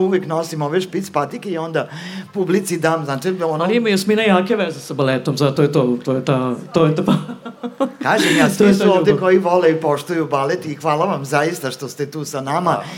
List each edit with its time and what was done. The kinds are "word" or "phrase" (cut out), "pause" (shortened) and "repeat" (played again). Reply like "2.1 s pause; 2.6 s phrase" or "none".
none